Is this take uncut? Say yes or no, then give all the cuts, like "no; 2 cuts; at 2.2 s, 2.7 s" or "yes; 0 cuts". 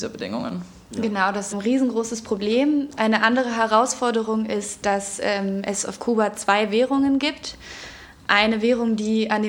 no; 1 cut; at 1.5 s